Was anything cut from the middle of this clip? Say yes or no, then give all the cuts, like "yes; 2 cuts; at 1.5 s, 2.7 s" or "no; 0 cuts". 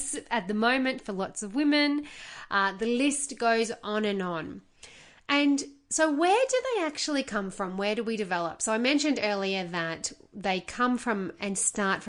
no; 0 cuts